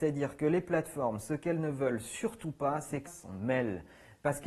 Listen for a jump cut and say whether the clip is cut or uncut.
cut